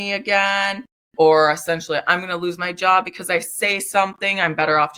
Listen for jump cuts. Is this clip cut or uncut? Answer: uncut